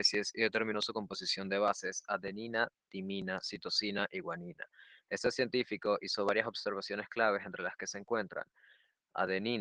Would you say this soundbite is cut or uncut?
uncut